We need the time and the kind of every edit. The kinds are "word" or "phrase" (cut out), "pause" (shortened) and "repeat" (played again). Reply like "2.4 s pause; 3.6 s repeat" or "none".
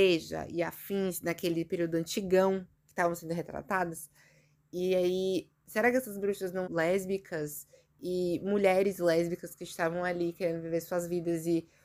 6.6 s word